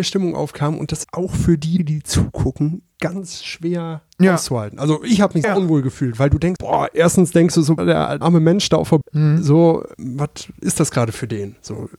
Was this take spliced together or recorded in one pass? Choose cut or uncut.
cut